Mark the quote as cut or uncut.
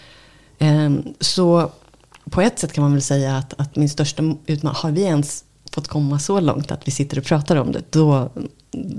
uncut